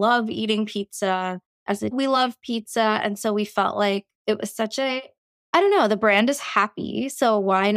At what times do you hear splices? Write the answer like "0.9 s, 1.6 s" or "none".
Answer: 1.9 s, 5.4 s